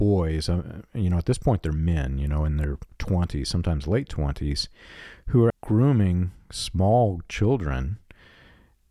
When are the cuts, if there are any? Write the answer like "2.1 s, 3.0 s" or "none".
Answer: 5.5 s